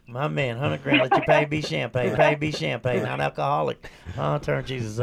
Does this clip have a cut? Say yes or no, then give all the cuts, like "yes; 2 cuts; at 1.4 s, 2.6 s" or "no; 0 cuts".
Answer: yes; 1 cut; at 2.2 s